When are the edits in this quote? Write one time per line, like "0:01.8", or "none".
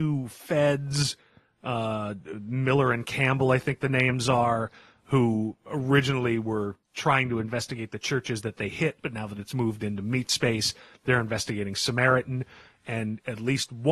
0:06.8